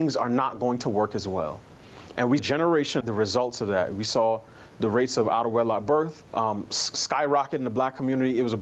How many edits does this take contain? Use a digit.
3